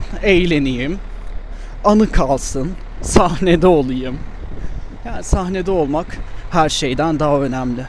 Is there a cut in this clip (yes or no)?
no